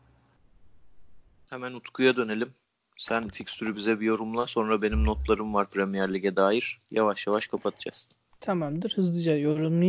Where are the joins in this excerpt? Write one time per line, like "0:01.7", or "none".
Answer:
none